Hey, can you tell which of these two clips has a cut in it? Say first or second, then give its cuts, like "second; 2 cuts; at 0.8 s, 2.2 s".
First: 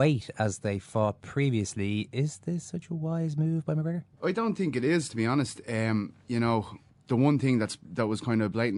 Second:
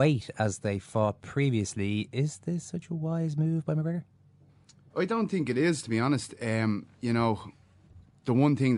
first; 2 cuts; at 4.1 s, 6.9 s